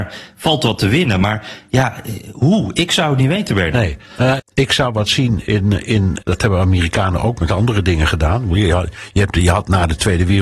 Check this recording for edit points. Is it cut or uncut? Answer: cut